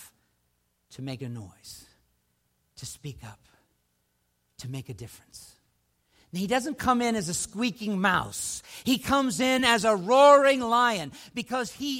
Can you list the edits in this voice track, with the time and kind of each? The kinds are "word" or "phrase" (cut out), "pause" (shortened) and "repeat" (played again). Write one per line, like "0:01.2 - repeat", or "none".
none